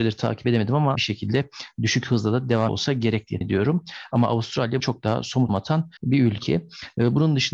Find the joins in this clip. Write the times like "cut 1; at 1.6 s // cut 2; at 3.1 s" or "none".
cut 1; at 0.9 s // cut 2; at 2.7 s // cut 3; at 3.4 s // cut 4; at 4.8 s // cut 5; at 5.5 s // cut 6; at 6.0 s